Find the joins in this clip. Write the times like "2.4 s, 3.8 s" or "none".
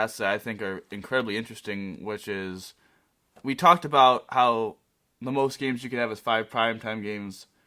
none